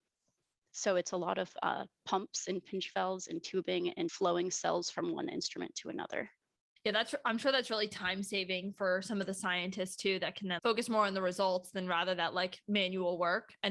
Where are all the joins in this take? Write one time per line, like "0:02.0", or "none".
0:04.1
0:10.6